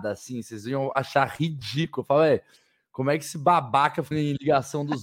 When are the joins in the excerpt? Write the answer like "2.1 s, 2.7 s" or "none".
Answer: 4.1 s